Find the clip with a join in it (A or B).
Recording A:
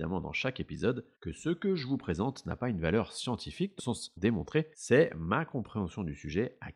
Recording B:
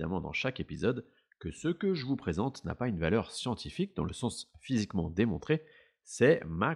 A